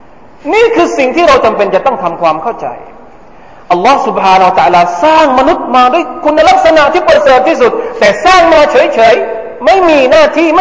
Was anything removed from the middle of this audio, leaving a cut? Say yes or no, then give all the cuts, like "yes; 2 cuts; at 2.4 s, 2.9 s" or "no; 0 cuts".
no; 0 cuts